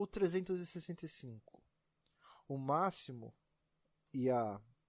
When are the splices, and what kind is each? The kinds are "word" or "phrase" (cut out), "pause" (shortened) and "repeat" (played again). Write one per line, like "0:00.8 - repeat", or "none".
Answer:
none